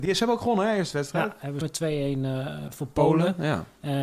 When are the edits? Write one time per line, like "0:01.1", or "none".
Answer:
0:01.6

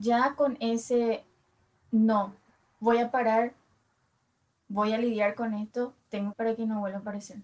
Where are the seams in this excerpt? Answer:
0:06.3

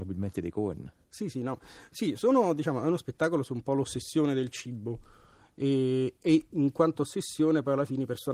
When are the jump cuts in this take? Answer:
none

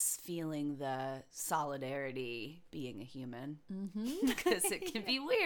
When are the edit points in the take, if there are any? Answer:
0:02.7

